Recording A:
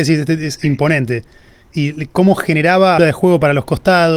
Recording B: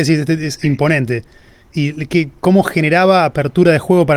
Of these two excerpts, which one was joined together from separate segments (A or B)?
A